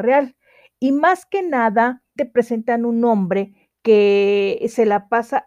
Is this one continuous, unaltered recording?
no; 1 cut; at 2.2 s

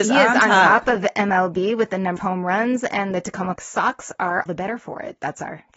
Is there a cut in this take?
yes; 3 cuts; at 2.2 s, 3.6 s, 4.5 s

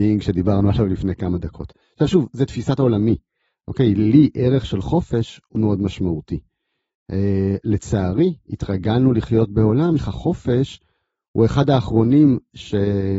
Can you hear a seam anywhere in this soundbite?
yes; 2 cuts; at 5.6 s, 10.0 s

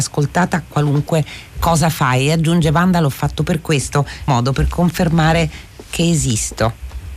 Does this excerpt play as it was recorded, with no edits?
no; 1 cut; at 4.3 s

